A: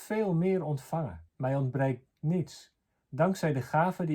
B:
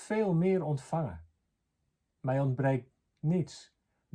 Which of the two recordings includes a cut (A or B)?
A